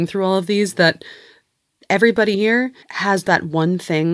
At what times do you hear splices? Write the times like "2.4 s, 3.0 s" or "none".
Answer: 2.3 s, 2.8 s